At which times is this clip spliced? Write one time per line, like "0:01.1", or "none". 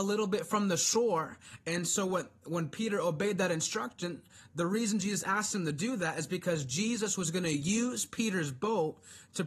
none